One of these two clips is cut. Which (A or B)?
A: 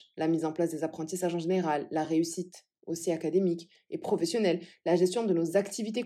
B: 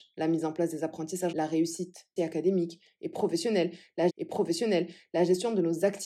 B